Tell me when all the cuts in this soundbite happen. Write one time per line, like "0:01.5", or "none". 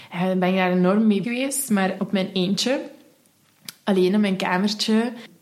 0:01.2
0:02.0